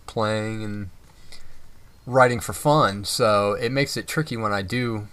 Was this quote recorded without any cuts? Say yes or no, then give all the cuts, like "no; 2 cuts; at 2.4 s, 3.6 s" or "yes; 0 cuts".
yes; 0 cuts